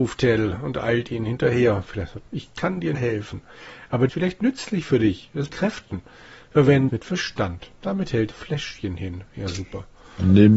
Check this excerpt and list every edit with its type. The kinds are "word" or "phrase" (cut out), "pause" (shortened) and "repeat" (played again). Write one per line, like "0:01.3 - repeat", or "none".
0:02.3 - pause
0:02.9 - phrase
0:04.1 - phrase
0:05.5 - phrase
0:06.9 - word
0:07.7 - pause
0:08.3 - phrase